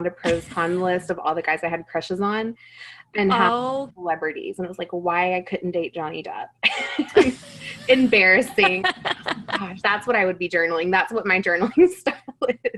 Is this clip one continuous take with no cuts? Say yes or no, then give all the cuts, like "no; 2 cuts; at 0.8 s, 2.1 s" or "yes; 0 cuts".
no; 2 cuts; at 3.9 s, 9.8 s